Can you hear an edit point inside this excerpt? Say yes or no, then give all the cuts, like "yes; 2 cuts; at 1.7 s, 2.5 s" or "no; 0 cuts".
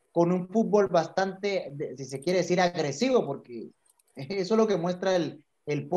yes; 1 cut; at 2.0 s